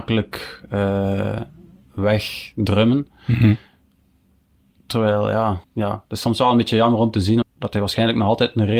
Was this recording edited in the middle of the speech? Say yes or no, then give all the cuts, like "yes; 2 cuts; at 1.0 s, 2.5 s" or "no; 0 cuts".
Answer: yes; 2 cuts; at 5.6 s, 7.4 s